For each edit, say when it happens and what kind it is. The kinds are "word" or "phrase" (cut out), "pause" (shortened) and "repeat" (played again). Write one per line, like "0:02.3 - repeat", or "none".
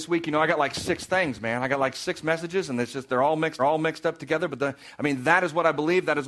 0:03.6 - repeat